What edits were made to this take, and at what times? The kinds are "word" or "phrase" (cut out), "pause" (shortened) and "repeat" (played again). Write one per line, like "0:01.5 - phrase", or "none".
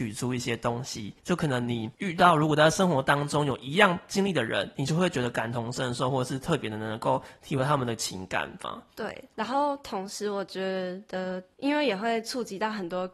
0:01.2 - pause
0:01.9 - pause